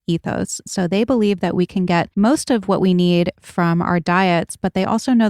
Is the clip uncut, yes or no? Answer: no